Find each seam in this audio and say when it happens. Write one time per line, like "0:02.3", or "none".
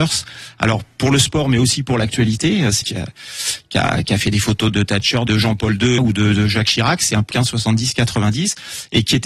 0:02.8
0:04.7
0:05.3
0:06.0
0:07.3